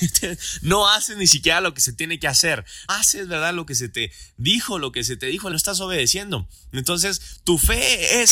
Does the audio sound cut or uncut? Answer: cut